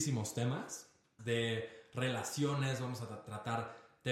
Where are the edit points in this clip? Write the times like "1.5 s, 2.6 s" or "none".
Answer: 1.2 s